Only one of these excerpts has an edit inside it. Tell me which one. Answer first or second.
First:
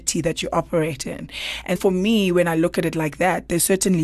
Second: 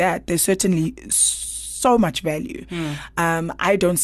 first